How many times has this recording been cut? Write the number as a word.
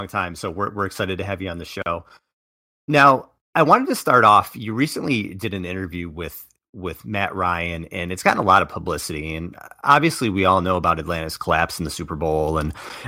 zero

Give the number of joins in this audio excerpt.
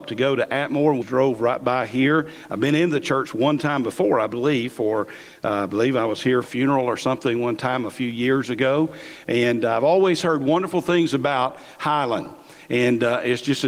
two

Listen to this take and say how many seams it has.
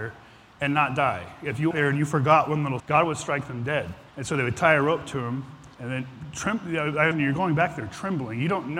five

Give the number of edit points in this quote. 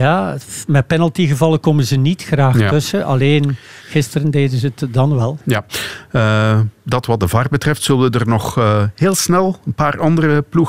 zero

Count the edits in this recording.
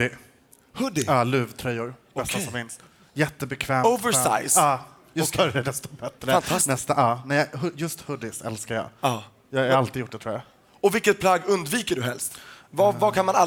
zero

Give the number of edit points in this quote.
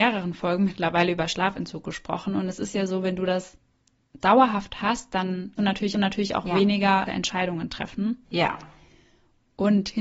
four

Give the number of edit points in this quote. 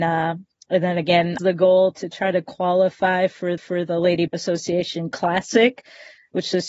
three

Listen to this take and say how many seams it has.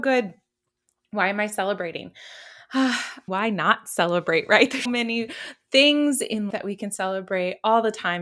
three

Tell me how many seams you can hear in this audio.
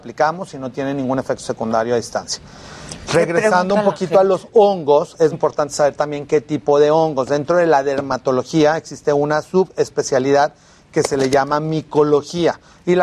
one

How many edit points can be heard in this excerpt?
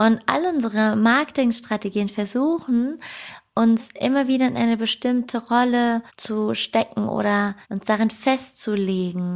two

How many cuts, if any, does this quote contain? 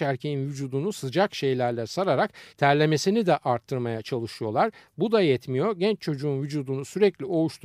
one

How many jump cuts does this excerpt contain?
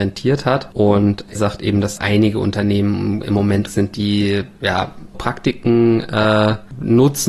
four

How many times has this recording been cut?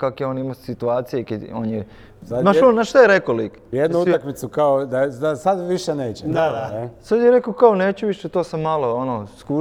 one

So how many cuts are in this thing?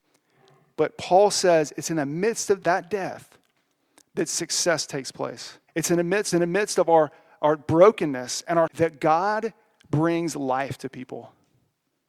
four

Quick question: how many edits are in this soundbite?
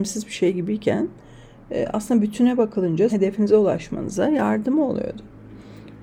one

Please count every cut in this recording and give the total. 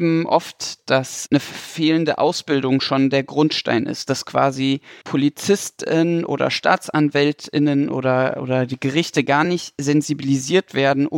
zero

